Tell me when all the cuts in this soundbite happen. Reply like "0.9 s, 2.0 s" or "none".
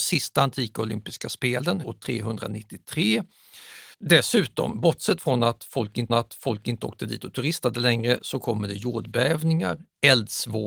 1.8 s, 3.9 s, 6.1 s